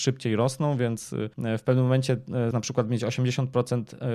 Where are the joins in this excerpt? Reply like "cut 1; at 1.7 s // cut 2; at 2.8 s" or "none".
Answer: cut 1; at 1.3 s // cut 2; at 2.5 s